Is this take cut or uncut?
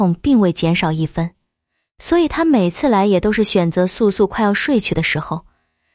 uncut